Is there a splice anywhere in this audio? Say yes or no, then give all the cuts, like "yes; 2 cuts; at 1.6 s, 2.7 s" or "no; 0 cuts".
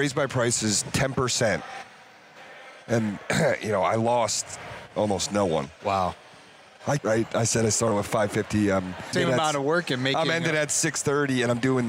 yes; 3 cuts; at 5.8 s, 7.0 s, 9.1 s